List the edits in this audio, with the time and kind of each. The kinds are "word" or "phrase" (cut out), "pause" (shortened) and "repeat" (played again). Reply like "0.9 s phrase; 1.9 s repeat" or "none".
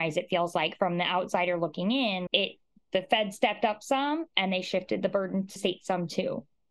2.3 s word; 4.3 s pause; 5.6 s word